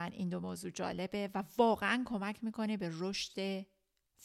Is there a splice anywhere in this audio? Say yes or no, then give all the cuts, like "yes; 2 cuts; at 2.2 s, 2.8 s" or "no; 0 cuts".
no; 0 cuts